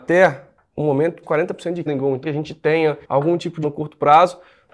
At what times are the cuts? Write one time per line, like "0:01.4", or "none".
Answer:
0:01.2
0:01.9
0:02.2
0:03.0
0:03.6